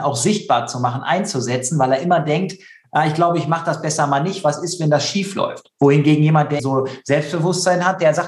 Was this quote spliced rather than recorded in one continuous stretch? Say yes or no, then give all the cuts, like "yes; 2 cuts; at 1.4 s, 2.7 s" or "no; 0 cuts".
yes; 1 cut; at 6.6 s